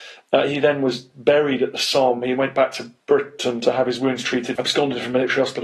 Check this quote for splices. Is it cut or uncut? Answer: cut